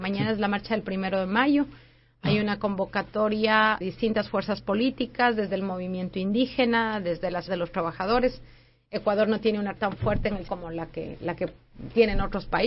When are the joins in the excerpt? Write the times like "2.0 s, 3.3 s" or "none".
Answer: 3.8 s, 7.5 s, 9.8 s, 10.5 s